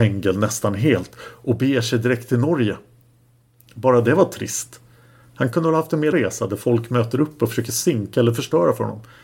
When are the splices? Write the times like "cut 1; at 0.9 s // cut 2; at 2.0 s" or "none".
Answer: cut 1; at 6.1 s

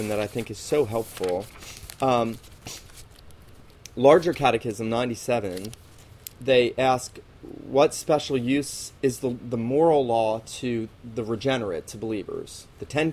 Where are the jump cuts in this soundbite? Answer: cut 1; at 6.3 s // cut 2; at 10.9 s

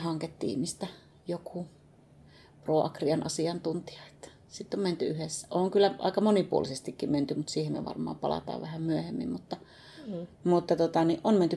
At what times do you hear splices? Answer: none

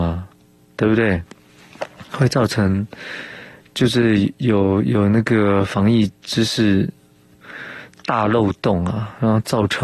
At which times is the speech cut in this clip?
none

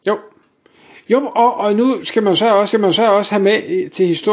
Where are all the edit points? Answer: cut 1; at 2.7 s

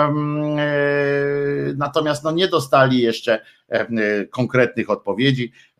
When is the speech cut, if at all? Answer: none

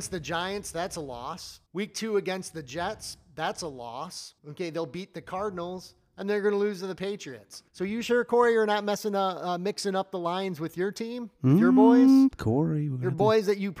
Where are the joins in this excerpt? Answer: cut 1; at 1.7 s // cut 2; at 4.4 s // cut 3; at 7.7 s

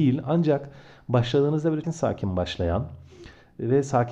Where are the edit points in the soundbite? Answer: cut 1; at 1.8 s

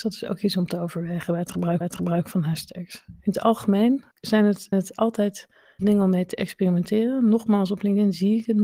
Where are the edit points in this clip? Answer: cut 1; at 1.8 s // cut 2; at 4.1 s // cut 3; at 4.7 s // cut 4; at 5.8 s

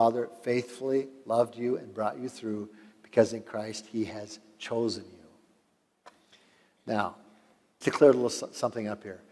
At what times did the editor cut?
cut 1; at 7.8 s

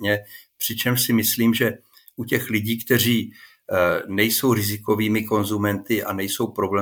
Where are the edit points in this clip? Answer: none

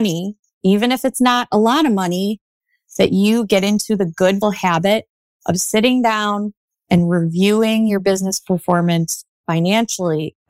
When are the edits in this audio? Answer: cut 1; at 4.4 s

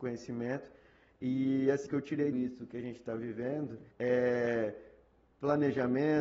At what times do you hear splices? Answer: cut 1; at 1.9 s // cut 2; at 2.3 s // cut 3; at 3.9 s

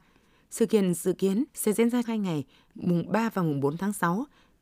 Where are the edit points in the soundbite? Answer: cut 1; at 1.5 s // cut 2; at 2.0 s

